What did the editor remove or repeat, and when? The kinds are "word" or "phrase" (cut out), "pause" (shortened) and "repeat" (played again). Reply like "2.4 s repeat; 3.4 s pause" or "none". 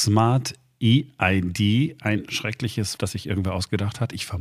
3.0 s word